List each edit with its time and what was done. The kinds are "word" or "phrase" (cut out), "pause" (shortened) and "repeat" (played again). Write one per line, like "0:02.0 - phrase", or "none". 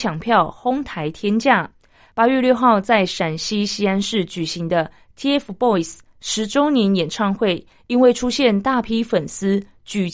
none